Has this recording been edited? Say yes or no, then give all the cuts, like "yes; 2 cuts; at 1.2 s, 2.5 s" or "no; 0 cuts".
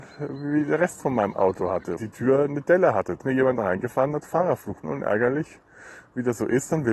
yes; 3 cuts; at 2.0 s, 3.2 s, 4.8 s